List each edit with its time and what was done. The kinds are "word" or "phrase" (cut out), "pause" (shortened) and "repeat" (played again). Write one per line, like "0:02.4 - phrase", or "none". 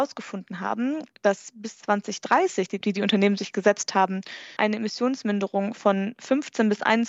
0:02.8 - word
0:04.6 - word